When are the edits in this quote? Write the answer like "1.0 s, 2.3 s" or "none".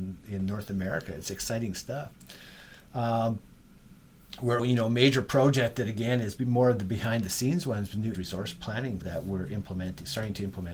4.6 s, 8.1 s, 9.0 s